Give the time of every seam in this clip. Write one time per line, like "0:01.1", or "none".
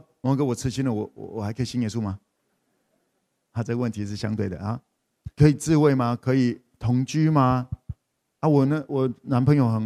0:05.3